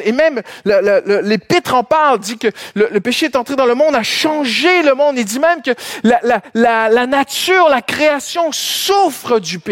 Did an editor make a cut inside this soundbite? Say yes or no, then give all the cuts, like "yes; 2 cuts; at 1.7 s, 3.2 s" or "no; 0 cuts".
no; 0 cuts